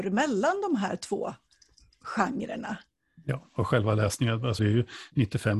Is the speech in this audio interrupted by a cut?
yes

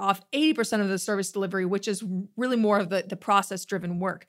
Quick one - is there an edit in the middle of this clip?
no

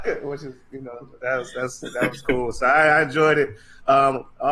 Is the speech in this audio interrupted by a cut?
no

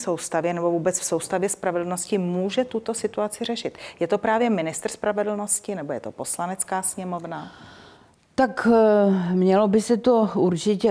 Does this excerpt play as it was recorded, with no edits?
yes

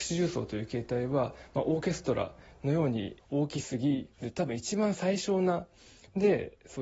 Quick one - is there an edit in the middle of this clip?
yes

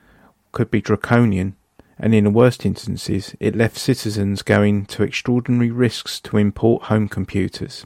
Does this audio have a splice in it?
no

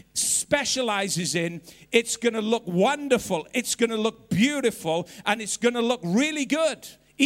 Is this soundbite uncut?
yes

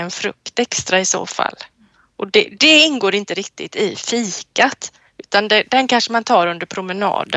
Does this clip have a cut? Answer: no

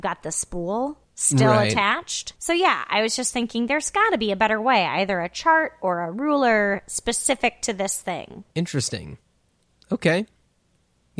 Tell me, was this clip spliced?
yes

